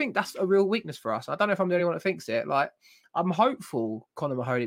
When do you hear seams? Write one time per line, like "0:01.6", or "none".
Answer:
none